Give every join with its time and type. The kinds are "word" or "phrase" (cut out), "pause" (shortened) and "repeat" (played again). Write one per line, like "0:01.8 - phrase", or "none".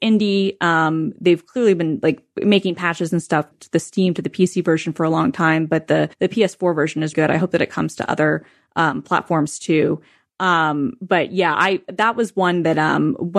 0:03.5 - word
0:06.1 - pause
0:07.1 - word